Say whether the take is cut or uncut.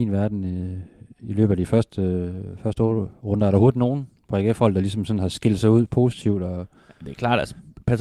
uncut